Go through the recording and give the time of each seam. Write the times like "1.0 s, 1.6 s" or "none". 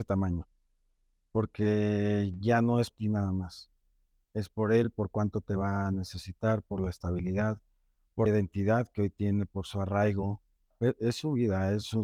2.9 s, 8.3 s